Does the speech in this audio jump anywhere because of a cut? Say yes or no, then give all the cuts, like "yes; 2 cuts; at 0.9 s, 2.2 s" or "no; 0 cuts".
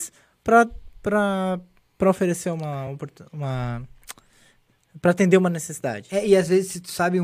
no; 0 cuts